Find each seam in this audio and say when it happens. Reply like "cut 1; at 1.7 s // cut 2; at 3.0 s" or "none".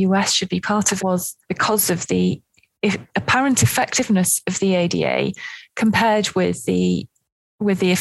cut 1; at 1.0 s // cut 2; at 1.4 s // cut 3; at 3.1 s